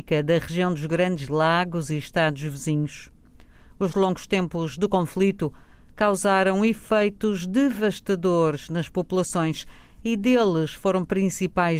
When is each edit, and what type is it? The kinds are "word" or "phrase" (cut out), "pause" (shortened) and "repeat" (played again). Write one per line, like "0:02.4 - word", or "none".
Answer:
none